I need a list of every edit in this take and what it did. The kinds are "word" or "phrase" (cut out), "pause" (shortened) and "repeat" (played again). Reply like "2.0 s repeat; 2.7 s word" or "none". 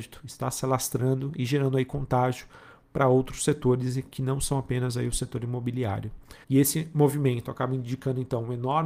6.4 s pause